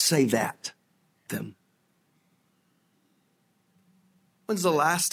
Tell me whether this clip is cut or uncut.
cut